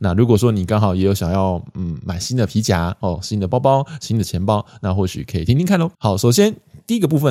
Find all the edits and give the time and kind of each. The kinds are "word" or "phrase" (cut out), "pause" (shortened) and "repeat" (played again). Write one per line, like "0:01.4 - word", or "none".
0:05.9 - pause